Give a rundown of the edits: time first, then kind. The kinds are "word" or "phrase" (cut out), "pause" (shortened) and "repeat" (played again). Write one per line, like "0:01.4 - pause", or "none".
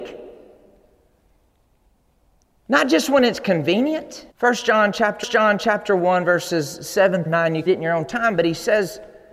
0:04.3 - pause
0:05.2 - repeat
0:07.3 - word
0:07.7 - phrase

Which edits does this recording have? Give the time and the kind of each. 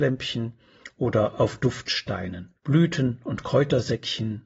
0:02.6 - pause

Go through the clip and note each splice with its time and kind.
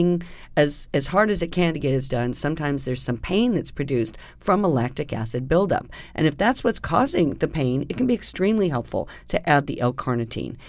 0:02.1 - word

